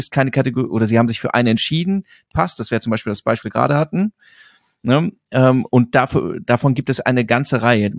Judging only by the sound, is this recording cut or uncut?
cut